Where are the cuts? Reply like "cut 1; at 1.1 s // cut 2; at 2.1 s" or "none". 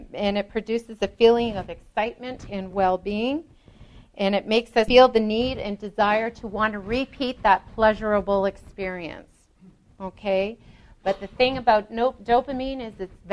none